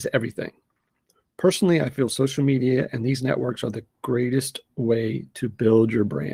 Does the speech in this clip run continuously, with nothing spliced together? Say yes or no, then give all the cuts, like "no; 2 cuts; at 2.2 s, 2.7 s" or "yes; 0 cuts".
yes; 0 cuts